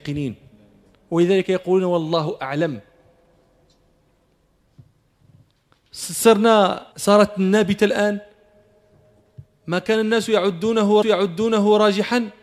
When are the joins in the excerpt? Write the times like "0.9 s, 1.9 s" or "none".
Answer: 6.9 s, 11.0 s